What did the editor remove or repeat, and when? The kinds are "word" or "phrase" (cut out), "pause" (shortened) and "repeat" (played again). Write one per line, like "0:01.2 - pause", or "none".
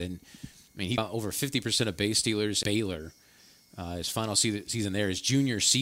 0:01.0 - word
0:02.6 - word